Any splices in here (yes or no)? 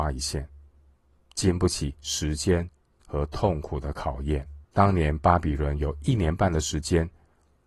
yes